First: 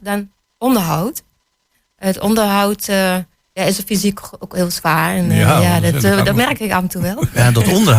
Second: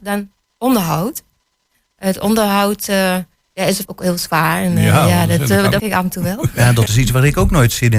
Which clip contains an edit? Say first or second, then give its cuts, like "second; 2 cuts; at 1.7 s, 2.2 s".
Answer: second; 3 cuts; at 3.9 s, 5.8 s, 6.9 s